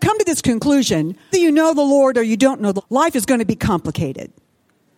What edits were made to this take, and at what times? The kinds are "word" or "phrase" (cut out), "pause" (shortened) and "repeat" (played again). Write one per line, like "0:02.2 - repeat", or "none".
0:01.3 - word
0:02.8 - word